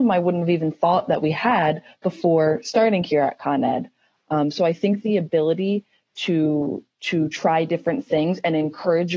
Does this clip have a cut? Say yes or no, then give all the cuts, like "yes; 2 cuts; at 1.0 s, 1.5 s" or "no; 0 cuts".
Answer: no; 0 cuts